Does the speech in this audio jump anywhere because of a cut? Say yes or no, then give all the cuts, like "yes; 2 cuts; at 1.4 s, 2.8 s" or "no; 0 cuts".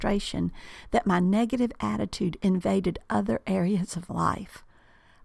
yes; 1 cut; at 4.1 s